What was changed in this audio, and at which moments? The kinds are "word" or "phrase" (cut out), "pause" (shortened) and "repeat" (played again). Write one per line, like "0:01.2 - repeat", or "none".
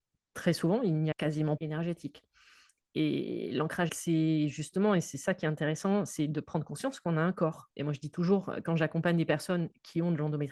0:01.1 - word
0:01.6 - phrase
0:03.9 - word